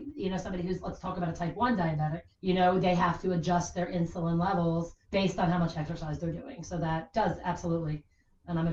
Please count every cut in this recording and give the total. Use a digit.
2